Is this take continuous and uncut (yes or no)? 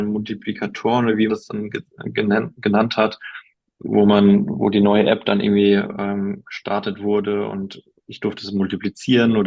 no